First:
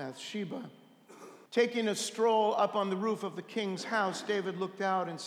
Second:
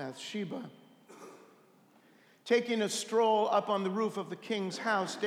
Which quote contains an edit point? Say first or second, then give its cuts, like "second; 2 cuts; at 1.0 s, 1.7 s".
first; 1 cut; at 1.5 s